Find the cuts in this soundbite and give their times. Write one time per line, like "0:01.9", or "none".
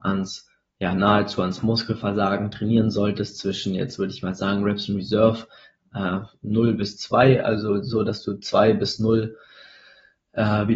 none